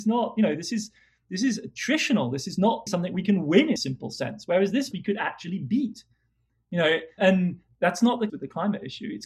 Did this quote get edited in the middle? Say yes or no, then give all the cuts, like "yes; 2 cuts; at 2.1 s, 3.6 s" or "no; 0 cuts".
yes; 5 cuts; at 2.9 s, 3.8 s, 4.9 s, 7.2 s, 8.3 s